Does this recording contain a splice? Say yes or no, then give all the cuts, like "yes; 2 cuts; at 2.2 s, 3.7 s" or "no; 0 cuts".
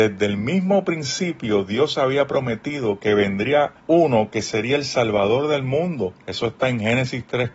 yes; 2 cuts; at 3.8 s, 6.2 s